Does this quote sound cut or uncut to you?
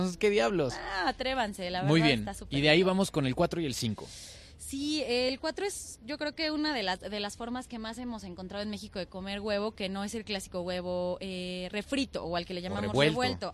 uncut